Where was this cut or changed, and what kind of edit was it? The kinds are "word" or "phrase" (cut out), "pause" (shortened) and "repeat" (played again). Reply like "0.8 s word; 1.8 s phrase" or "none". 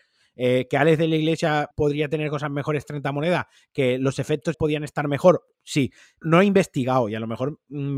1.7 s word; 4.5 s word; 5.5 s word; 6.2 s word